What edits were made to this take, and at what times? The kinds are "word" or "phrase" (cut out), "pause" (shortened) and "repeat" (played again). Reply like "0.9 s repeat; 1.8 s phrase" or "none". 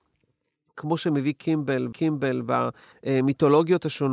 1.9 s repeat